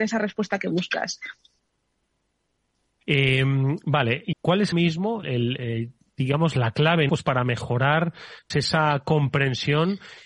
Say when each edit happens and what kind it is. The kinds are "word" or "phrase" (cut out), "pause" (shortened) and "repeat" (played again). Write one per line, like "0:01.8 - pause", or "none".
0:04.3 - word
0:04.7 - word
0:05.2 - word
0:05.6 - word
0:07.1 - word
0:08.5 - word